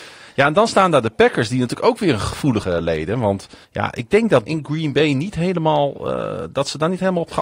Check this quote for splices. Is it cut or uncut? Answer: cut